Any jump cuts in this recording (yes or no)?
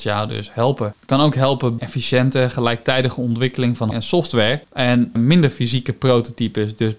yes